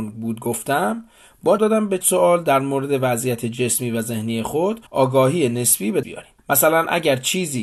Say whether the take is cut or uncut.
cut